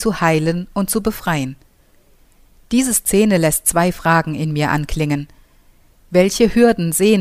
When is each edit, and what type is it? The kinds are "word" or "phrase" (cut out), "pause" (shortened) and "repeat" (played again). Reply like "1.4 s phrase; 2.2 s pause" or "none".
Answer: none